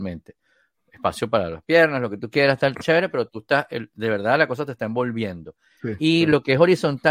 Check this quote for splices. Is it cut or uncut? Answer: uncut